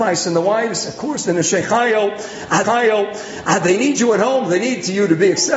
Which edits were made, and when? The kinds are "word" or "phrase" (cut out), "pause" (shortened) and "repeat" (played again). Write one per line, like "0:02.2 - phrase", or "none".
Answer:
0:02.6 - repeat

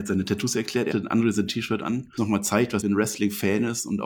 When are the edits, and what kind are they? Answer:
0:00.9 - word
0:01.5 - word
0:02.2 - word
0:02.8 - word

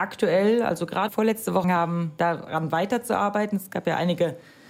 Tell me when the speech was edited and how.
0:01.1 - phrase
0:01.6 - word

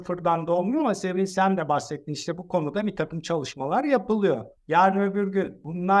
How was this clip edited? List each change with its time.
0:04.6 - pause

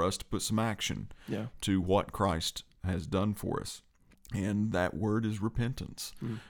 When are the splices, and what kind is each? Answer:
0:04.1 - pause

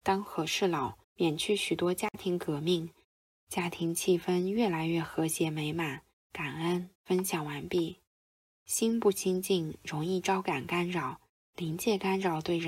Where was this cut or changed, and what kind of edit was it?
0:01.0 - pause
0:07.0 - pause

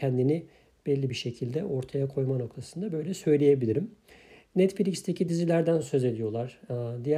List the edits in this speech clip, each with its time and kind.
none

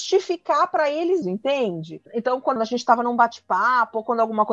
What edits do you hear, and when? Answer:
0:01.2 - word
0:02.1 - pause
0:02.6 - phrase

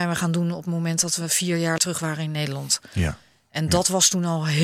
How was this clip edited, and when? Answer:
0:01.8 - word

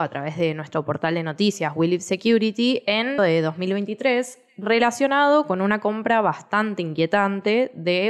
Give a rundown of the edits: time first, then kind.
0:03.2 - word

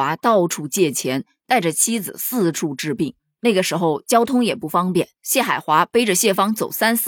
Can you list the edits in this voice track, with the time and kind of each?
0:05.2 - phrase

